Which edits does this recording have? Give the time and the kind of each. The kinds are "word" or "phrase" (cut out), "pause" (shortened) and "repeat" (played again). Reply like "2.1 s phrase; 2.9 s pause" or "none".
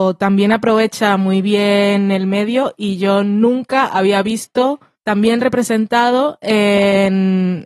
none